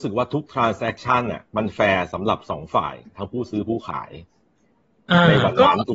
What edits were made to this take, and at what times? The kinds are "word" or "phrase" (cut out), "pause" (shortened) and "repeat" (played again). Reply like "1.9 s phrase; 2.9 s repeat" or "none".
1.5 s pause